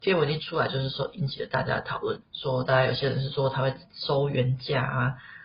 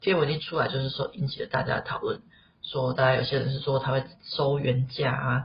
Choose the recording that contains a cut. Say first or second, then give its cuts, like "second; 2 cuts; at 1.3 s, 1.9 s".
first; 1 cut; at 2.2 s